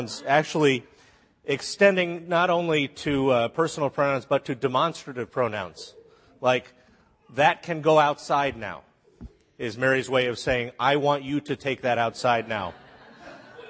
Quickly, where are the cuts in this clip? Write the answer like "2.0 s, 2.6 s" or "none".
none